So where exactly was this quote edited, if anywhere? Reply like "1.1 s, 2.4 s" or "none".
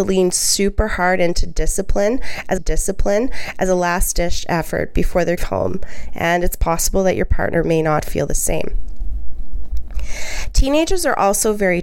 2.6 s, 5.4 s

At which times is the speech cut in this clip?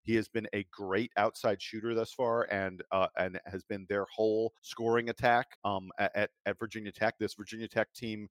4.6 s, 5.5 s

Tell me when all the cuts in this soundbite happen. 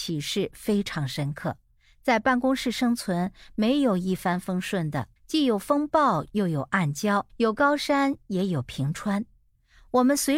1.8 s, 5.2 s, 7.3 s

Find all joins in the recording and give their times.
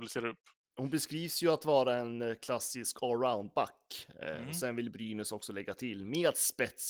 none

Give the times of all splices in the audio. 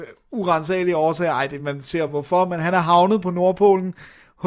none

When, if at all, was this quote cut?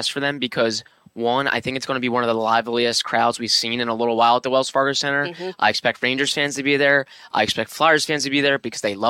none

